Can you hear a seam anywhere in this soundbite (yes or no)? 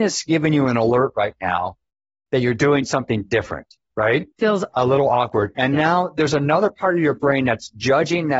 no